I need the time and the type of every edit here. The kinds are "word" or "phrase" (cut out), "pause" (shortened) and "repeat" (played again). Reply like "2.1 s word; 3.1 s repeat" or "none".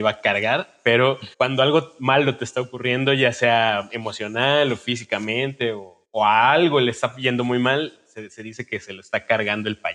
1.3 s pause; 6.0 s pause